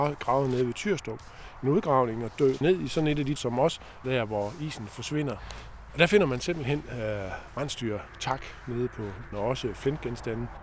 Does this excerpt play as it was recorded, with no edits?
no; 4 cuts; at 2.6 s, 3.4 s, 4.0 s, 9.3 s

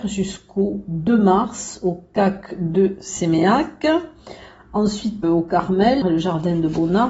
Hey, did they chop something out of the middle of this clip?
yes; 2 cuts; at 5.2 s, 6.0 s

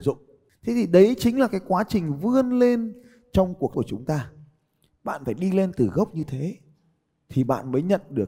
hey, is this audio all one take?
no; 1 cut; at 3.7 s

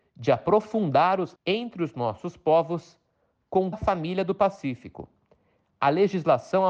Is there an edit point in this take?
yes; 2 cuts; at 1.3 s, 3.7 s

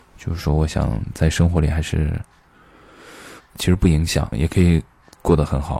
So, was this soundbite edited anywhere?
yes; 2 cuts; at 3.4 s, 4.3 s

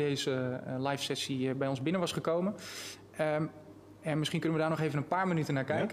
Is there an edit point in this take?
no; 0 cuts

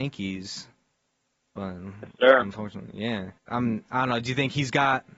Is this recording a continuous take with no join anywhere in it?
no; 1 cut; at 3.4 s

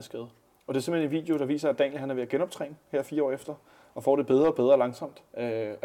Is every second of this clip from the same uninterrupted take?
yes; 0 cuts

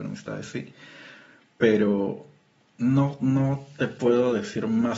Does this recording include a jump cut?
no; 0 cuts

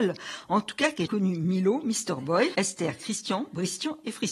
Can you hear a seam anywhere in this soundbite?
yes; 2 cuts; at 1.1 s, 2.5 s

